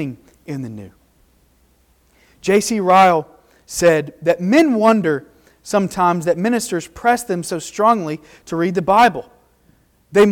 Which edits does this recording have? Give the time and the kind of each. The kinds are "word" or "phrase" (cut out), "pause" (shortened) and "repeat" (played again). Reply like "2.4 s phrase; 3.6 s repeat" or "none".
none